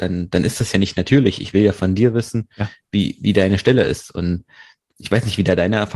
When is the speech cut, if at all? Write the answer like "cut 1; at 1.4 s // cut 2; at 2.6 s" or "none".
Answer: none